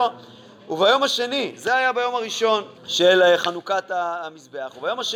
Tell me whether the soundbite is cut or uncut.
cut